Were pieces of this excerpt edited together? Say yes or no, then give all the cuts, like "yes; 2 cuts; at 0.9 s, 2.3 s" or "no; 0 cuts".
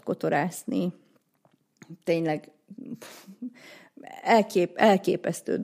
no; 0 cuts